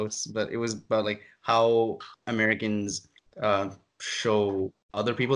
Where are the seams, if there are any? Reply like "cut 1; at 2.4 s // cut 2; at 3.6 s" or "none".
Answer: none